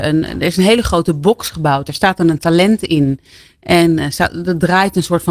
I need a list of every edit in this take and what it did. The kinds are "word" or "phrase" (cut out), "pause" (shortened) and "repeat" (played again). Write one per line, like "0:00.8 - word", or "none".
none